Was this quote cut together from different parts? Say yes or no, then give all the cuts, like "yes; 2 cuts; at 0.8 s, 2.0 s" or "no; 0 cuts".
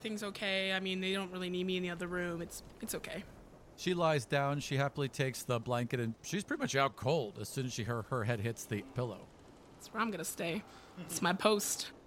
no; 0 cuts